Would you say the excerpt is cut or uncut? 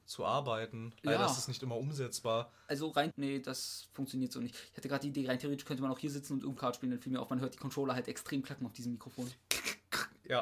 cut